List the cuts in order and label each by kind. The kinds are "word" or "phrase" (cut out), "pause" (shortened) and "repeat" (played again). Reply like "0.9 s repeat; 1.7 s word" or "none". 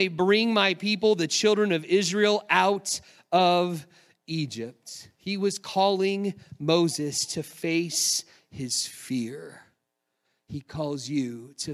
none